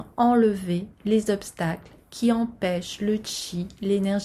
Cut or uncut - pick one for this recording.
uncut